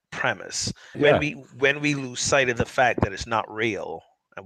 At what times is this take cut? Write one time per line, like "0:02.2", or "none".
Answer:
0:00.9